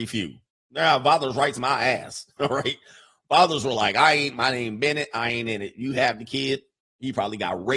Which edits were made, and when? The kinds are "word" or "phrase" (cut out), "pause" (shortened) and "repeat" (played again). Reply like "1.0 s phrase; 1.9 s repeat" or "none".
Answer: none